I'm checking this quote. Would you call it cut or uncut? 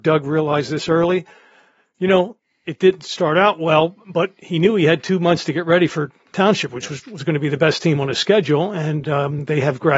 uncut